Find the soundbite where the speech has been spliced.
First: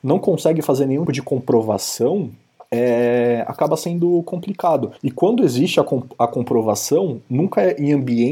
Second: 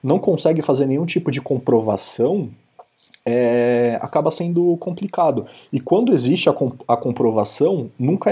first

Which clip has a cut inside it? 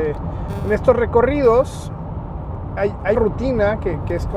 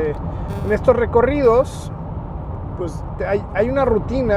first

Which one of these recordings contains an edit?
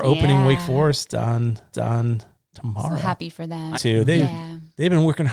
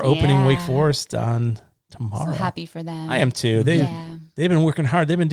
first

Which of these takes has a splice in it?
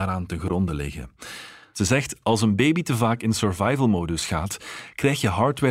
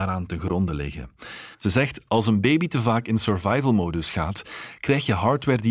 second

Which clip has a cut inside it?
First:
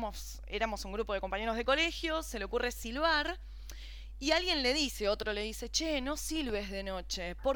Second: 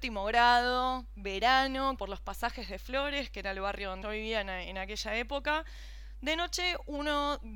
second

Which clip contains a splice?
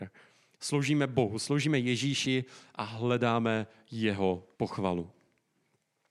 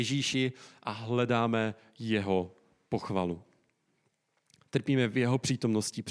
first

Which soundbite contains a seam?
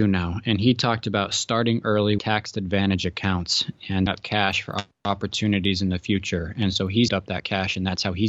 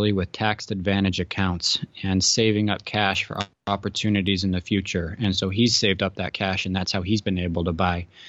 first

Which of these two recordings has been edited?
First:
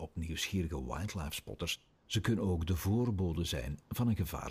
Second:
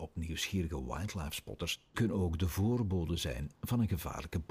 second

